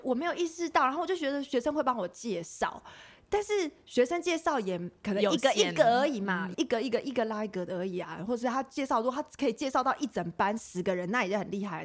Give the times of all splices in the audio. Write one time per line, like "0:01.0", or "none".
0:05.0
0:06.5